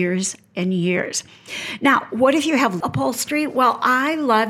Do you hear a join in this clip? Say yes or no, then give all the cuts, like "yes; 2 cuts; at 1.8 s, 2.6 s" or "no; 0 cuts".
yes; 1 cut; at 2.8 s